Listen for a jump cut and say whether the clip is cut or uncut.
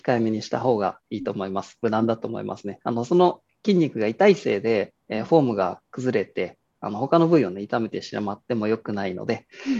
uncut